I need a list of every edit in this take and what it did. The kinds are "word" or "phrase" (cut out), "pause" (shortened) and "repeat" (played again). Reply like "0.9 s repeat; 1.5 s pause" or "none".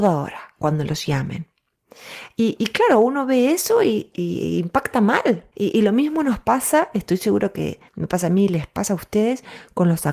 5.5 s pause; 7.9 s pause